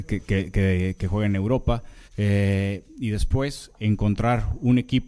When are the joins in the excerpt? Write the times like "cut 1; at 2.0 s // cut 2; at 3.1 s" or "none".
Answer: cut 1; at 2.1 s